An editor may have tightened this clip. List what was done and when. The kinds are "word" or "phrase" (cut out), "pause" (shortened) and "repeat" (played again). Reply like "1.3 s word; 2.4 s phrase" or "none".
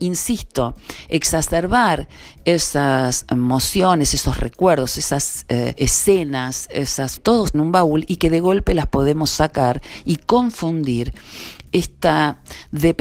7.2 s phrase; 7.5 s phrase

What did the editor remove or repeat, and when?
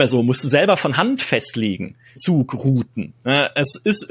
2.2 s word

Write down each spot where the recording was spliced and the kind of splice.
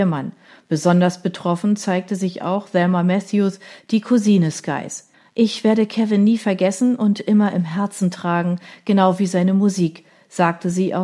5.1 s pause

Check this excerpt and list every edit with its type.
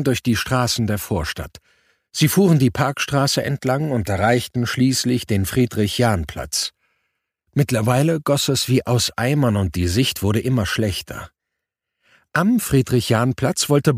none

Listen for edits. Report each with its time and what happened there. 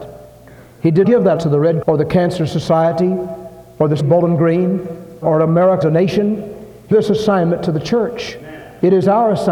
1.0 s word; 1.4 s word; 1.8 s word; 4.0 s word; 5.2 s word; 5.8 s word; 6.9 s word

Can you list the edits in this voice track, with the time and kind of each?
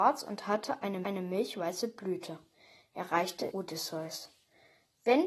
1.0 s repeat; 3.5 s word

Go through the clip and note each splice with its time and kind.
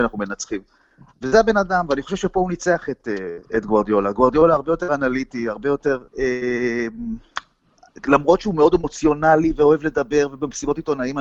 6.1 s pause

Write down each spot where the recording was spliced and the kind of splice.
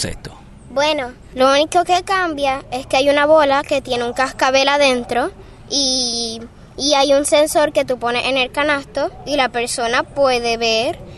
none

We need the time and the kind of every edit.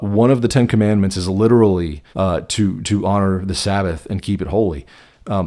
2.1 s pause

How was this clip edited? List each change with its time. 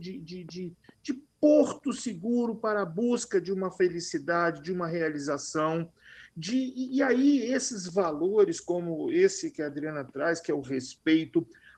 none

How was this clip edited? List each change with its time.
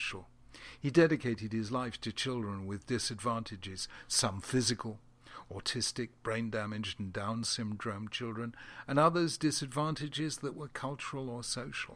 none

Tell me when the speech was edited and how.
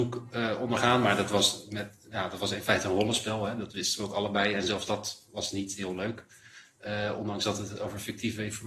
none

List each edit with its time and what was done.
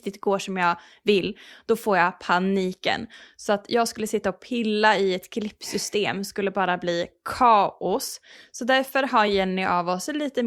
none

